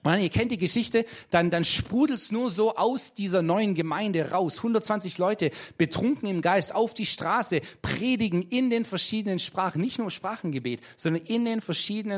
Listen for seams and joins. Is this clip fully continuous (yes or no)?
yes